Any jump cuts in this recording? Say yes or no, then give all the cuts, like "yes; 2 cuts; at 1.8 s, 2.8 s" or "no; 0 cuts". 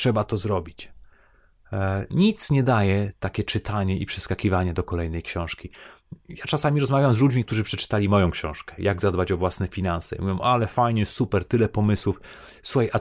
no; 0 cuts